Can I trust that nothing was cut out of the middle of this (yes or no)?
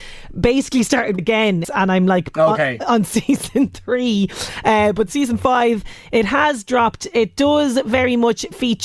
no